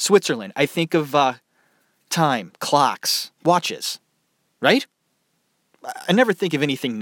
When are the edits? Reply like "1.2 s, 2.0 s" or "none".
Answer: none

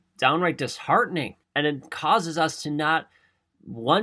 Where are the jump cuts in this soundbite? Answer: 1.4 s

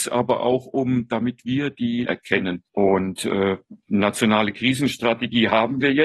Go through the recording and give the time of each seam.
2.0 s, 2.7 s

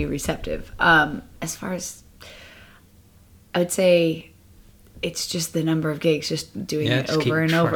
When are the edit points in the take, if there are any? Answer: none

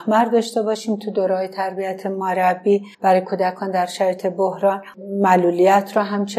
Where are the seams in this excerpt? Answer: 2.9 s

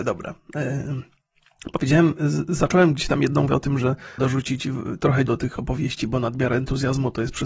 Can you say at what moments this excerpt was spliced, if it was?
3.5 s, 4.2 s, 5.3 s

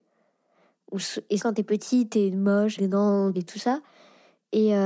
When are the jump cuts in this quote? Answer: 1.4 s, 2.8 s, 3.3 s

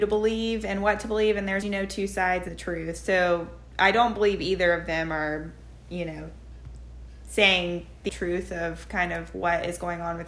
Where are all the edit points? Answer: 1.6 s, 2.5 s, 8.1 s

